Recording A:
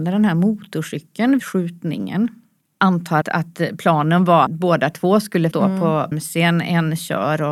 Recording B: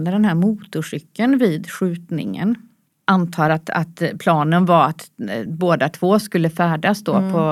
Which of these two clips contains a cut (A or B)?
A